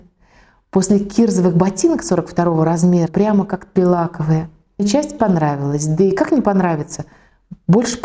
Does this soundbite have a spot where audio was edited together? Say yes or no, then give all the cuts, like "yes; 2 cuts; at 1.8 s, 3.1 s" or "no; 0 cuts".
yes; 4 cuts; at 3.1 s, 3.8 s, 4.8 s, 5.2 s